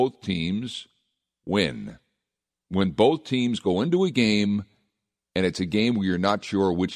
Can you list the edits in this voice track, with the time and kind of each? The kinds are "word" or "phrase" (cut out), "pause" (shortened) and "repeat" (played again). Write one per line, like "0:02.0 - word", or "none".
none